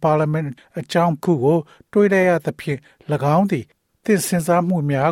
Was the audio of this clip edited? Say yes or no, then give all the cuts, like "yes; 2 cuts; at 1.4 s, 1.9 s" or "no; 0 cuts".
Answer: yes; 1 cut; at 1.2 s